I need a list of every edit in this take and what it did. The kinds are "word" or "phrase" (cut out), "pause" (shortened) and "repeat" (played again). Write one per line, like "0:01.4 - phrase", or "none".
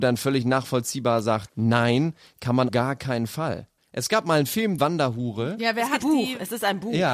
0:01.5 - word
0:02.7 - word
0:03.8 - pause
0:04.8 - word
0:06.0 - word